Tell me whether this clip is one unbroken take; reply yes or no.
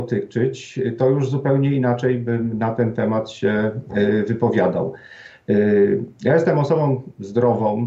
yes